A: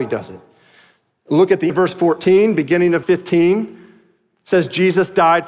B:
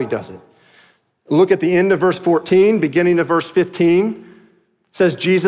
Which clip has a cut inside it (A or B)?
A